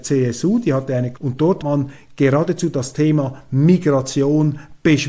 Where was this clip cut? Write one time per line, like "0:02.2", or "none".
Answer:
0:01.1
0:01.6